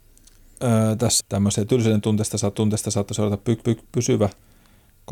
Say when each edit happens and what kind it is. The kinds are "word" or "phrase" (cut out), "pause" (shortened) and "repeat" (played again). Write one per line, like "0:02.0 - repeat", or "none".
0:01.2 - phrase
0:02.5 - repeat
0:03.6 - repeat